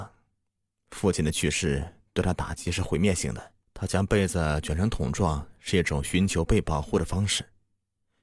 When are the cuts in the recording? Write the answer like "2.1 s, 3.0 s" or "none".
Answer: 3.6 s